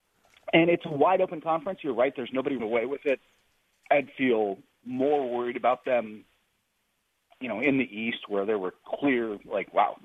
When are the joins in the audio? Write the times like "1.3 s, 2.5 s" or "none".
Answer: 2.6 s